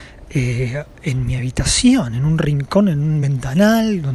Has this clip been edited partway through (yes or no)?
no